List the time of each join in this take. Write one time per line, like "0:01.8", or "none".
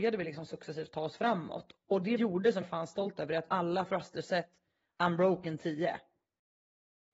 0:02.2
0:02.6
0:03.5